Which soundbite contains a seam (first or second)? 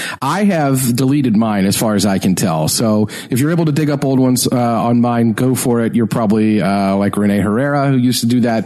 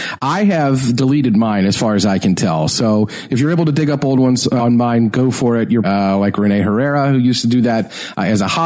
second